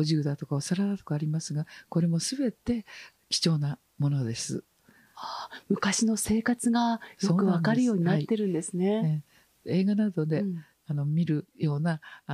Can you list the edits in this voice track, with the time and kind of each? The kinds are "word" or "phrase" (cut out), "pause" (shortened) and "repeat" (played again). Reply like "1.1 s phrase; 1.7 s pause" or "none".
none